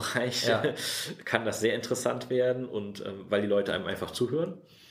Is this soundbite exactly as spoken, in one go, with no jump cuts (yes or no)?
yes